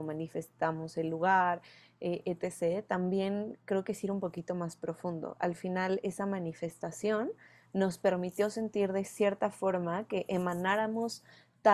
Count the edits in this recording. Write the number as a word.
zero